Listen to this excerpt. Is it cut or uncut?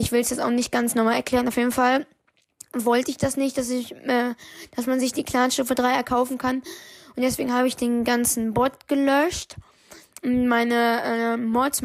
uncut